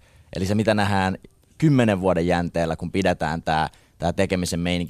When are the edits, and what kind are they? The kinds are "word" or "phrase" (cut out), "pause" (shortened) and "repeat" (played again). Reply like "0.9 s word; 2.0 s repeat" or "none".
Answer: none